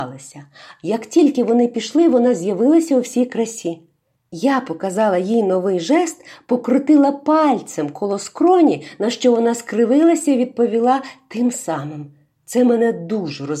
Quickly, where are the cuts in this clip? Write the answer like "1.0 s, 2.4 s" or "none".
none